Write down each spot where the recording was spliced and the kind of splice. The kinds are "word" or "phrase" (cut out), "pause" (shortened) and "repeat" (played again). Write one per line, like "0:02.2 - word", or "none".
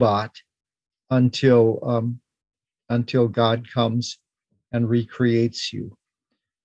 none